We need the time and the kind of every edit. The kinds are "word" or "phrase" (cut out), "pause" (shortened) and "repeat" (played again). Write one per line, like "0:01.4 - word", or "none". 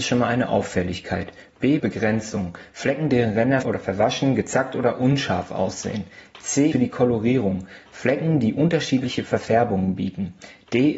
0:01.8 - word
0:03.6 - word
0:06.7 - word